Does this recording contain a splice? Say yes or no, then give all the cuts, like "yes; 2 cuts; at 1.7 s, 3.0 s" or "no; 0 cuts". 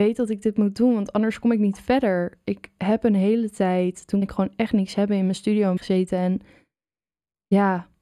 yes; 2 cuts; at 4.2 s, 5.8 s